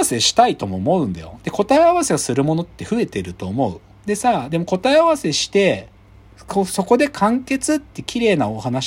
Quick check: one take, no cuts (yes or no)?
yes